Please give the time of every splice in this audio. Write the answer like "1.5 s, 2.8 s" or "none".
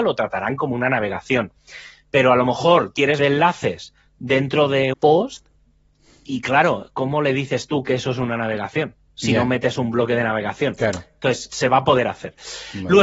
3.2 s, 4.9 s, 9.1 s